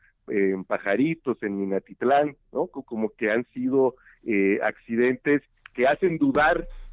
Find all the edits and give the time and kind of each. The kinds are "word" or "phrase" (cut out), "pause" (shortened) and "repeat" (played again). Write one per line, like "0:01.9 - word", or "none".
none